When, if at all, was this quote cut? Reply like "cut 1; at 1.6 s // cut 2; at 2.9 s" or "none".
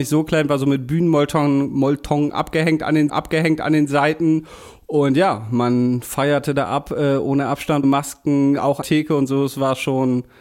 cut 1; at 3.1 s // cut 2; at 7.8 s // cut 3; at 8.8 s